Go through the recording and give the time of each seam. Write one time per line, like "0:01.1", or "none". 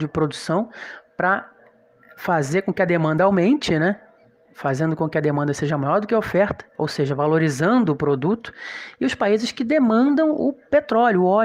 none